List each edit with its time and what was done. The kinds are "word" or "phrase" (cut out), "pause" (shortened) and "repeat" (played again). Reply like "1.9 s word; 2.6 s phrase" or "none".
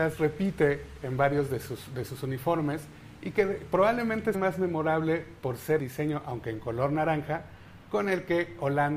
4.3 s word; 5.8 s word